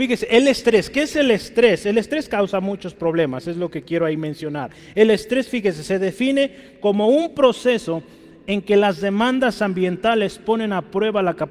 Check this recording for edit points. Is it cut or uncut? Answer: uncut